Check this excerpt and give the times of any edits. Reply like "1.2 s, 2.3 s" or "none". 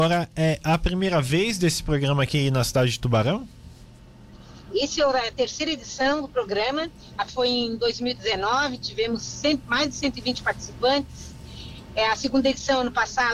7.3 s